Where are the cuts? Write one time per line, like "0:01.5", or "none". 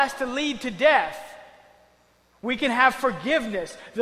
none